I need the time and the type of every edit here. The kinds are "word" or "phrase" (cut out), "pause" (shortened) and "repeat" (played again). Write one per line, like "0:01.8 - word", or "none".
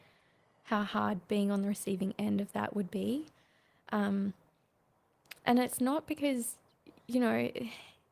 none